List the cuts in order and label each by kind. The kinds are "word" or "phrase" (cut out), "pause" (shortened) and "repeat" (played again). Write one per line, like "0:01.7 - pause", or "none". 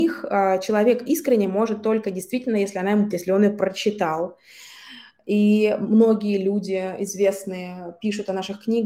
0:03.1 - word